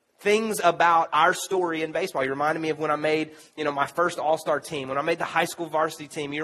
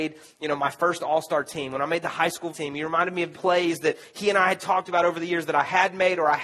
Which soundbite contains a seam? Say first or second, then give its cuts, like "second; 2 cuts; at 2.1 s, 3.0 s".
second; 2 cuts; at 2.5 s, 3.3 s